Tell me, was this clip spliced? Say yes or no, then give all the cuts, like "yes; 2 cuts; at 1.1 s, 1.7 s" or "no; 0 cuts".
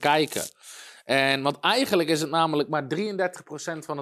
no; 0 cuts